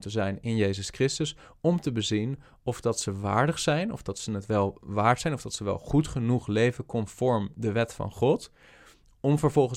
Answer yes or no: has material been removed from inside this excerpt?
no